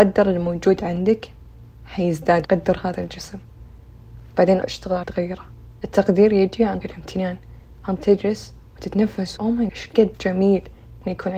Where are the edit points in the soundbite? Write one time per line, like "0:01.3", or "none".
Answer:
0:02.4
0:04.6
0:05.0
0:05.8
0:06.8
0:08.0
0:09.4
0:09.7